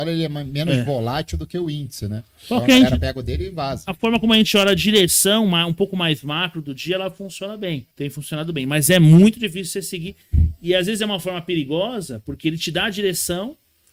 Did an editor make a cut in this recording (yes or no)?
yes